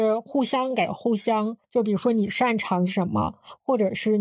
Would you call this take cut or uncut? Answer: cut